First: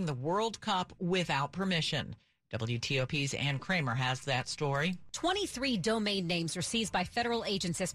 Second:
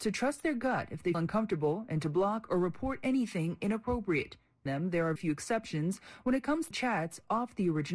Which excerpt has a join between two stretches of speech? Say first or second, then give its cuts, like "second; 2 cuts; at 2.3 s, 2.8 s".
second; 4 cuts; at 1.1 s, 4.7 s, 5.2 s, 6.7 s